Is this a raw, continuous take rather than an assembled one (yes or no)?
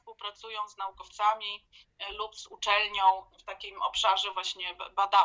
yes